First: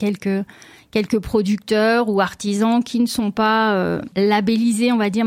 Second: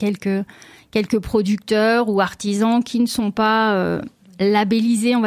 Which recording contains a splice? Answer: first; 1 cut; at 4.1 s

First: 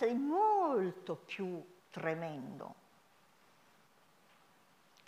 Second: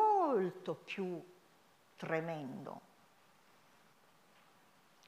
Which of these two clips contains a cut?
first; 1 cut; at 1.8 s

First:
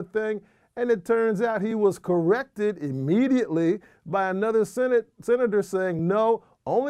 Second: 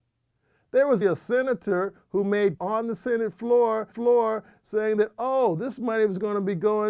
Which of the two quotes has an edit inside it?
second; 3 cuts; at 1.0 s, 2.6 s, 3.9 s

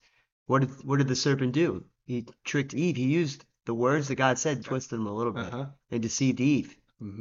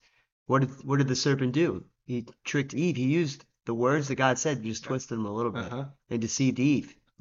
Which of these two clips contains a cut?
first; 1 cut; at 4.6 s

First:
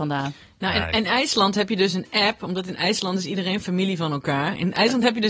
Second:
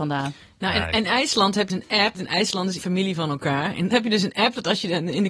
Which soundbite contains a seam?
second; 4 cuts; at 1.7 s, 2.1 s, 2.8 s, 3.9 s

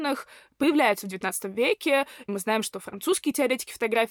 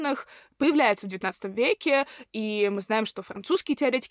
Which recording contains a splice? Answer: first; 1 cut; at 2.3 s

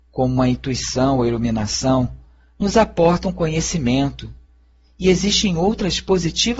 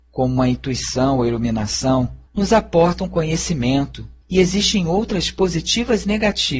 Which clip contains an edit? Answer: second; 2 cuts; at 2.3 s, 4.2 s

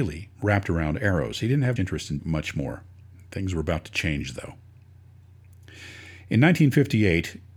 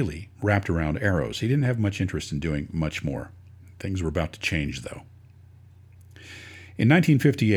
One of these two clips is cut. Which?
first; 2 cuts; at 1.8 s, 2.2 s

